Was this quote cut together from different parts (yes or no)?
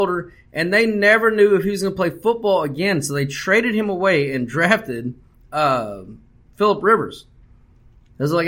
yes